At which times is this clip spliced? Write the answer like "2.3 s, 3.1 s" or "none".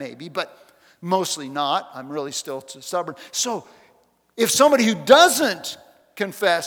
none